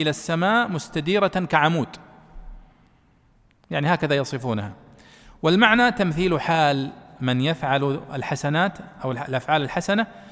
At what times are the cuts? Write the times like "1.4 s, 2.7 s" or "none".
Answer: none